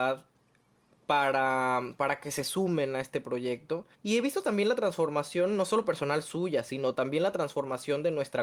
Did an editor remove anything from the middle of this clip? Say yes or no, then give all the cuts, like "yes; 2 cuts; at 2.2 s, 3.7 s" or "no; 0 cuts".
yes; 1 cut; at 3.9 s